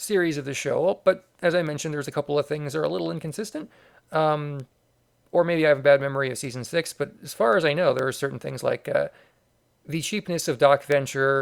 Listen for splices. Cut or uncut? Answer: uncut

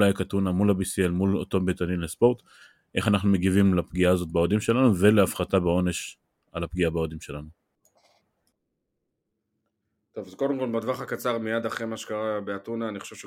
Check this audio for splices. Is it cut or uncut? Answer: uncut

